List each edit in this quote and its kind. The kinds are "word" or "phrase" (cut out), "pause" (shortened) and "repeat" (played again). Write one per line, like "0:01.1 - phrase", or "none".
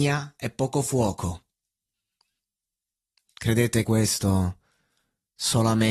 0:03.8 - phrase

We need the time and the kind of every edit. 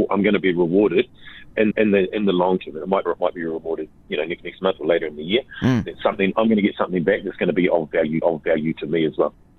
0:01.7 - repeat
0:03.0 - phrase
0:04.4 - word
0:08.2 - repeat

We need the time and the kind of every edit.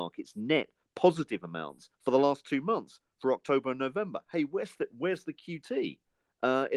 0:01.9 - pause

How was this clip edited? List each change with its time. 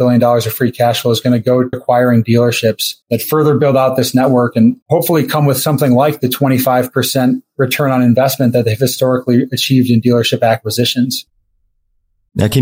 0:01.7 - word
0:03.0 - pause

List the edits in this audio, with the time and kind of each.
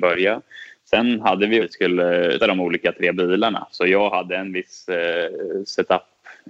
0:01.6 - phrase
0:02.4 - word

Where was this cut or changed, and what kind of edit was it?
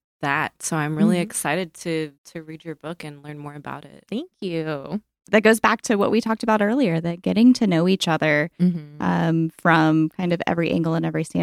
0:02.2 - pause

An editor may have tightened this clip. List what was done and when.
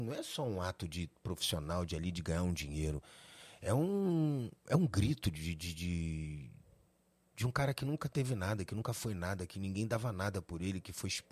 none

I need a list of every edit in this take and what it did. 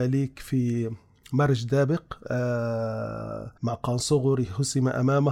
0:03.6 - pause

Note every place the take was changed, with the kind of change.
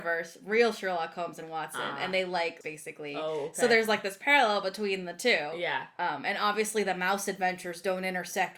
0:02.6 - phrase

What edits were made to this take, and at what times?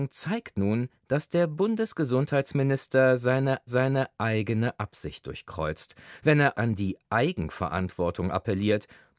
0:01.0 - pause
0:03.7 - repeat
0:06.5 - word

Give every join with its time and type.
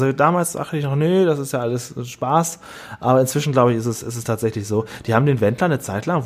none

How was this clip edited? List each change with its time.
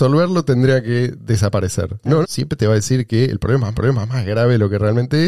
0:02.2 - word
0:03.7 - repeat

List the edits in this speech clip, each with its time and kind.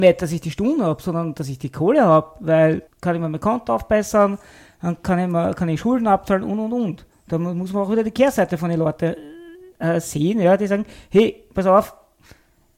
0:02.9 - word
0:09.7 - pause

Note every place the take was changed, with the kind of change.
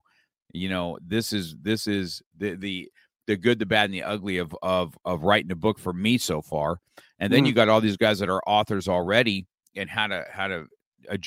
none

